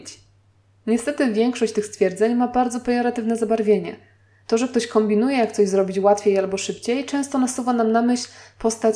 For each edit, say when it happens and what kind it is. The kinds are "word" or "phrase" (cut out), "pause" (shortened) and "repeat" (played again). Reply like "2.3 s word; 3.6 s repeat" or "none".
none